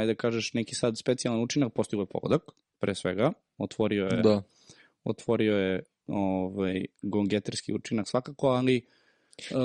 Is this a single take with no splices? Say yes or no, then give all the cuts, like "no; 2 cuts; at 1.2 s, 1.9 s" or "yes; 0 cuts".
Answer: yes; 0 cuts